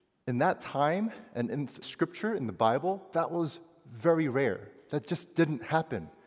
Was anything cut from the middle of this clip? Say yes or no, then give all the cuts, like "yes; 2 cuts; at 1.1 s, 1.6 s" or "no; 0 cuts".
yes; 1 cut; at 1.8 s